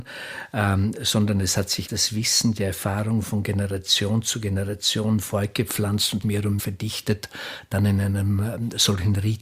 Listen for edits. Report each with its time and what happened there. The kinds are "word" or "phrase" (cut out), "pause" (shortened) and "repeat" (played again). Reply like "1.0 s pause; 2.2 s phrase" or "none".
1.9 s word; 6.2 s word; 6.6 s word